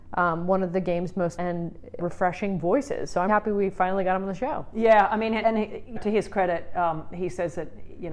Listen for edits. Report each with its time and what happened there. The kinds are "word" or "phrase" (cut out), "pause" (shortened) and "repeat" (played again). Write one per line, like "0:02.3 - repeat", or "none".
0:01.4 - word
0:02.0 - word
0:03.3 - word
0:05.4 - word
0:06.0 - word